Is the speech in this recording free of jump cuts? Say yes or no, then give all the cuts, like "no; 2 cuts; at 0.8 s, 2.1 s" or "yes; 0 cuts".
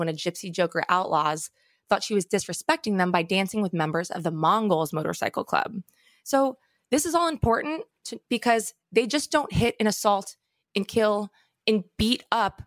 yes; 0 cuts